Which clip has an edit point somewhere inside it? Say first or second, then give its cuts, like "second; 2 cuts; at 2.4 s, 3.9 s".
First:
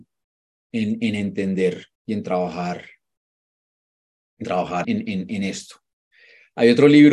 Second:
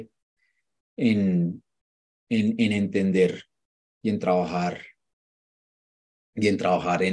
first; 3 cuts; at 1.9 s, 4.4 s, 4.8 s